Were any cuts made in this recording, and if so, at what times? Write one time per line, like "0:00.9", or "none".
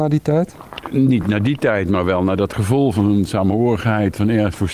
none